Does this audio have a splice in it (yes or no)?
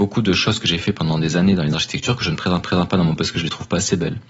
yes